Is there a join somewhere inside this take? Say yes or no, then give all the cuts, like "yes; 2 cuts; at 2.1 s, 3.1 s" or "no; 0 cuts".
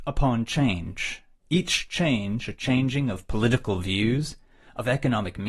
no; 0 cuts